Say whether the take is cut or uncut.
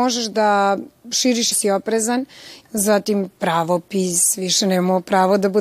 cut